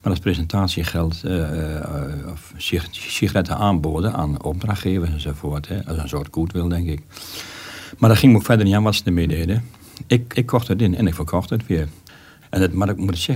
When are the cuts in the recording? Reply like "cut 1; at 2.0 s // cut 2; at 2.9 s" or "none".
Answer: cut 1; at 10.3 s